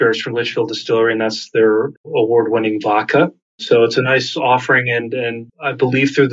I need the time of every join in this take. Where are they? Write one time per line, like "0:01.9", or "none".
none